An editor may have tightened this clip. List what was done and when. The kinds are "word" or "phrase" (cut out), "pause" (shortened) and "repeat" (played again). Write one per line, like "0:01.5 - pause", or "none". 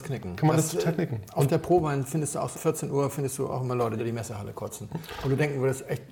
0:02.5 - word
0:04.0 - word